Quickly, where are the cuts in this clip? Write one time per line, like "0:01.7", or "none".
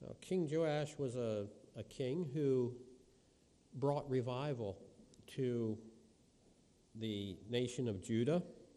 none